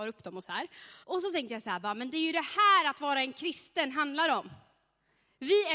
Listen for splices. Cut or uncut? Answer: cut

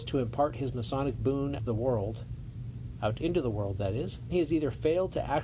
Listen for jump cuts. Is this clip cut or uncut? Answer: cut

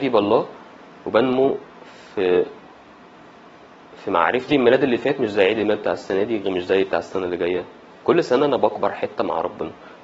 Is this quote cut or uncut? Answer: cut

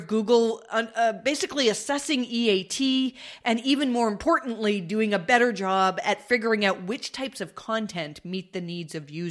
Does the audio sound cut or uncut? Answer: uncut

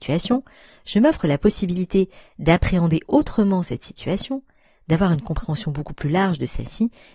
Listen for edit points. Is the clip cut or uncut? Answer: uncut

